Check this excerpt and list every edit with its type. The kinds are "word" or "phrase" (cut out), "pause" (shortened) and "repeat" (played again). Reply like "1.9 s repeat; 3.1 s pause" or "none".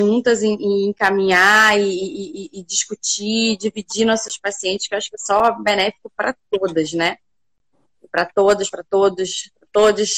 none